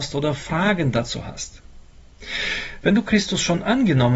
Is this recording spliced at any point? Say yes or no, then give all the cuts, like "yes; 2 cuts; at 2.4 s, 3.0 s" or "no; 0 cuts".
no; 0 cuts